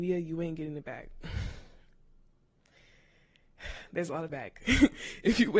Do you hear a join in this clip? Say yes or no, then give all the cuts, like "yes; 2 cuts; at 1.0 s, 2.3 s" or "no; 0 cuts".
yes; 1 cut; at 4.3 s